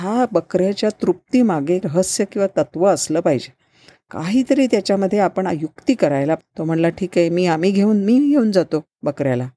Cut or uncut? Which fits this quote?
cut